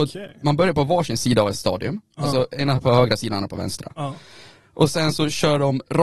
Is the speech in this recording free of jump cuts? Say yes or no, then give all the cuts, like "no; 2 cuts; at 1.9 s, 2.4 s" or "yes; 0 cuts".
yes; 0 cuts